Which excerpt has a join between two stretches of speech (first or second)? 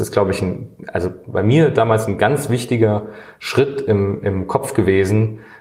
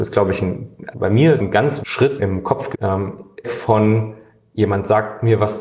second